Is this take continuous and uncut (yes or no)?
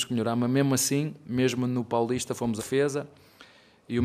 no